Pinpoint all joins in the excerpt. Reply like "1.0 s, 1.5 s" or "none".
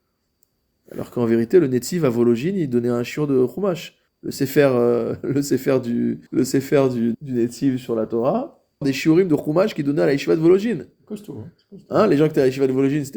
4.1 s, 6.3 s, 7.1 s, 8.8 s

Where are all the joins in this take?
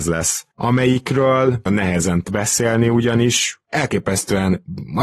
1.7 s, 2.2 s

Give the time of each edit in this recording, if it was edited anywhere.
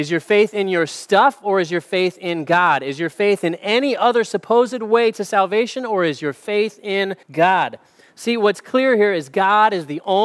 7.2 s

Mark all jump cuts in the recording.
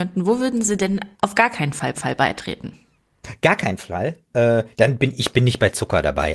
1.1 s, 1.9 s, 4.7 s

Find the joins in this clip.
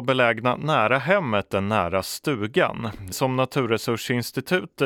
3.1 s

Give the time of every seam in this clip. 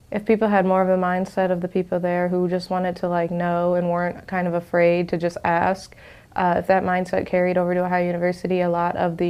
none

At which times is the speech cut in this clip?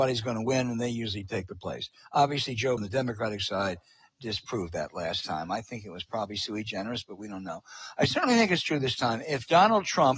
2.8 s

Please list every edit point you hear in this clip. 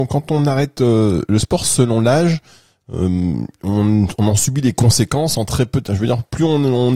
none

